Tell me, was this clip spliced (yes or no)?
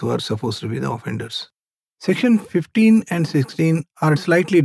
yes